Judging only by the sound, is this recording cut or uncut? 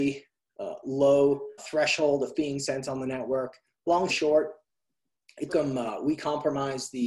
cut